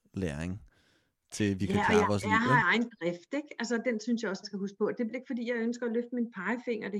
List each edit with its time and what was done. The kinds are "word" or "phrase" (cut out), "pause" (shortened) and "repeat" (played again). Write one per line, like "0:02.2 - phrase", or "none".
0:02.6 - word
0:04.4 - word
0:05.1 - word